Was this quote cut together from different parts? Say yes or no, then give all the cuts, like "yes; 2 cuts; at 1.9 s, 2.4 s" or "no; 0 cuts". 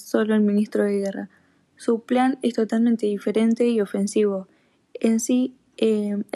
no; 0 cuts